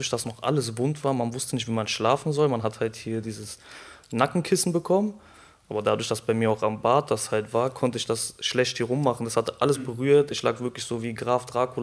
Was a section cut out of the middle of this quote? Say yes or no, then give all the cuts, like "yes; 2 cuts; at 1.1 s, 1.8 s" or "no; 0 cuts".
no; 0 cuts